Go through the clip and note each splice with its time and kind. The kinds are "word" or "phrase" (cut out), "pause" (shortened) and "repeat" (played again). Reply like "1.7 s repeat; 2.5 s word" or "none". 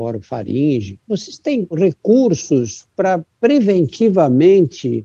none